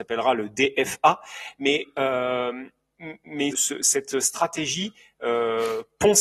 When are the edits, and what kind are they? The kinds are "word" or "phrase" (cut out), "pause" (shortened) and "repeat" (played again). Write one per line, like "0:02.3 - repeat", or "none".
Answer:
0:03.5 - word